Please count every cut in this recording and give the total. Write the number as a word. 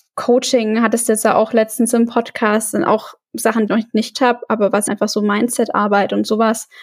three